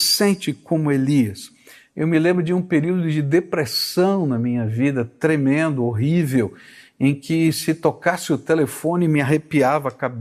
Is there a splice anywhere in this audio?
no; 0 cuts

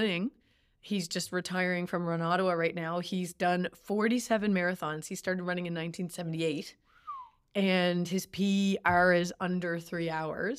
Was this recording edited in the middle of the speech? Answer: no; 0 cuts

